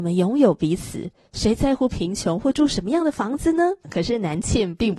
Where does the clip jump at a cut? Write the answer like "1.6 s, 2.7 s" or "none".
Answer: 3.8 s